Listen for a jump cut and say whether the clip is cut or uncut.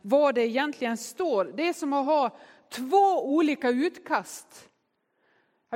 uncut